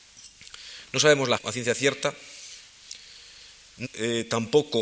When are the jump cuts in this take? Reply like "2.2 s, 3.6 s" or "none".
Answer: 1.4 s, 3.8 s